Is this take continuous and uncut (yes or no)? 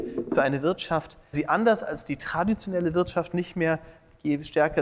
no